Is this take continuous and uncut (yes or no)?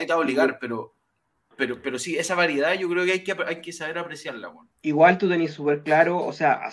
no